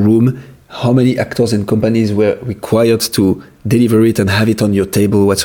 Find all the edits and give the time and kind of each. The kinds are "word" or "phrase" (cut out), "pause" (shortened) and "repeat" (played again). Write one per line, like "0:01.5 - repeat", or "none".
none